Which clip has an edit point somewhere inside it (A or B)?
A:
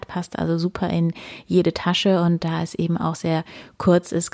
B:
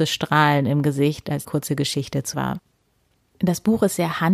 B